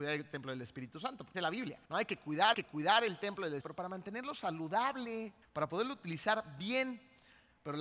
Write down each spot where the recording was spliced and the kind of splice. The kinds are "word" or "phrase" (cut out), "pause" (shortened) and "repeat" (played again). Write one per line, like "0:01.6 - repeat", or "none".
0:01.3 - phrase
0:01.8 - pause
0:02.5 - repeat
0:03.6 - phrase
0:05.4 - pause